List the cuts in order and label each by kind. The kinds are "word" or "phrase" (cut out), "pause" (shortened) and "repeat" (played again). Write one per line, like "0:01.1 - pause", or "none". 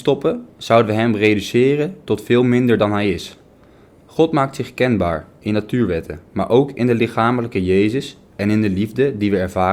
none